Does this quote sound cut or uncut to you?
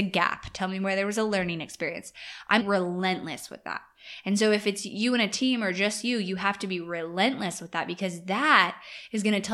cut